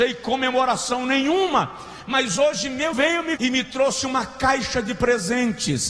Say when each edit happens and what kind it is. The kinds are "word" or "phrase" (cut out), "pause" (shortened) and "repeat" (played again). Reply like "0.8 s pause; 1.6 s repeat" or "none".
2.9 s word; 3.4 s word